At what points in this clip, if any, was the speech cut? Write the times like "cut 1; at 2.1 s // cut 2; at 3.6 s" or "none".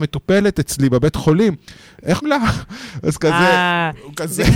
cut 1; at 2.2 s